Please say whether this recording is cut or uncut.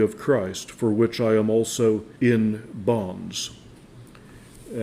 cut